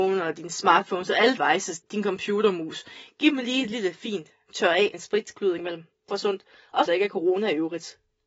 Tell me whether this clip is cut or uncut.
cut